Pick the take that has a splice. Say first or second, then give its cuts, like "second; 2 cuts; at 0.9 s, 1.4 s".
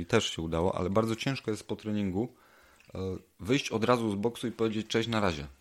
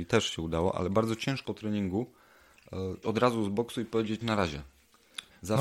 second; 3 cuts; at 1.5 s, 3.0 s, 4.2 s